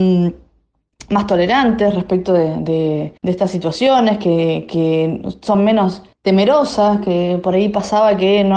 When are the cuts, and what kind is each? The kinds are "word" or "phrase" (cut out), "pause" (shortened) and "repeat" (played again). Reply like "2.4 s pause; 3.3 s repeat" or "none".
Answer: 3.2 s pause; 6.1 s pause